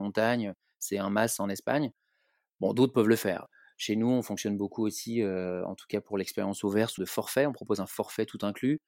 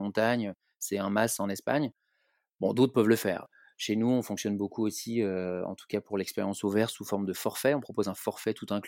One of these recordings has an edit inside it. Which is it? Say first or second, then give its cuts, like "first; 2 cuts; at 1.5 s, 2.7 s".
first; 1 cut; at 7.0 s